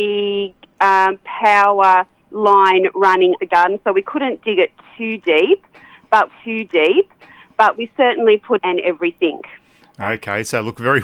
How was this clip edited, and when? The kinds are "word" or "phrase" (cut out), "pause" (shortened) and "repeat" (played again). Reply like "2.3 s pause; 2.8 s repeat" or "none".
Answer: 3.4 s word; 6.3 s repeat; 8.6 s phrase